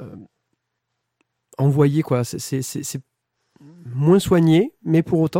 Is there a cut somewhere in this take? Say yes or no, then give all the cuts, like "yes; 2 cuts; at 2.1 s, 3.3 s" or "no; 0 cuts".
no; 0 cuts